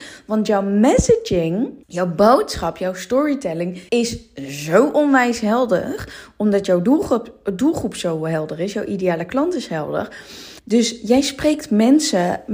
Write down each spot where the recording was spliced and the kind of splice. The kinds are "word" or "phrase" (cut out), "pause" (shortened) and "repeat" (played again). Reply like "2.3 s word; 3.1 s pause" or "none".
1.8 s pause; 3.9 s pause; 10.6 s pause